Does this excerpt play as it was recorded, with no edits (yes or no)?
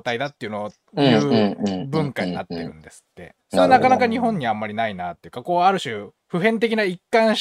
no